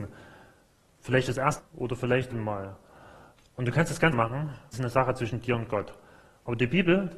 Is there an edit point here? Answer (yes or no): yes